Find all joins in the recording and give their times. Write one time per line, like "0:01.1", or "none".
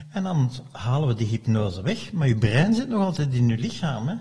none